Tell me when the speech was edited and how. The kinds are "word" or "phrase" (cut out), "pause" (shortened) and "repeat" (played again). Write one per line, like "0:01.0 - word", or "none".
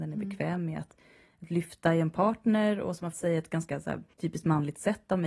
0:03.1 - word
0:04.1 - pause

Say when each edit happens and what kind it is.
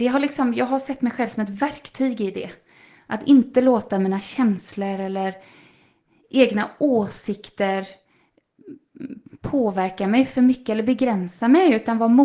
none

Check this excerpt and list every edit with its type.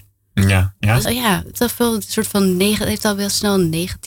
0:01.0 - word
0:01.5 - phrase

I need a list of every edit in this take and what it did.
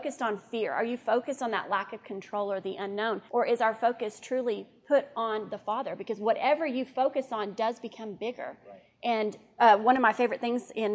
0:03.3 - pause

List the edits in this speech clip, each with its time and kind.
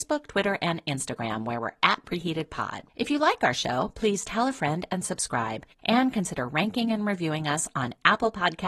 0:02.9 - pause
0:05.7 - pause

